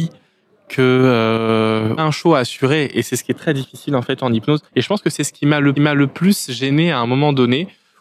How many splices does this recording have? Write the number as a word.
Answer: three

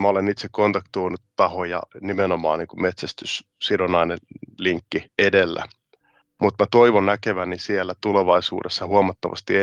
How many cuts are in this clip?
two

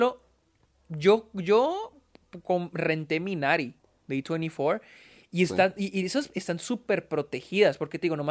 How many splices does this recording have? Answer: zero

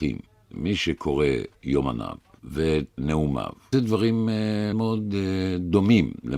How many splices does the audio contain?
four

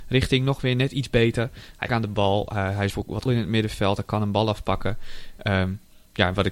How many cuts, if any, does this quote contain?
three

